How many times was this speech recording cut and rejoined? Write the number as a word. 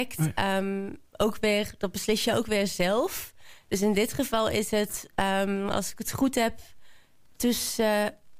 zero